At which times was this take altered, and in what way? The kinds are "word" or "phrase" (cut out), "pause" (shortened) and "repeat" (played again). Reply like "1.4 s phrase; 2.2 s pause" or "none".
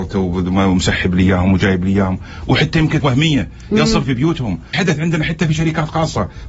3.0 s phrase; 4.0 s phrase; 4.7 s word